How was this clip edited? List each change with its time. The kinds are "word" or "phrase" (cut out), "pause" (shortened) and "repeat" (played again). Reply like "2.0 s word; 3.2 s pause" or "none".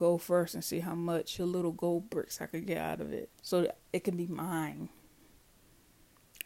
1.4 s phrase; 3.3 s pause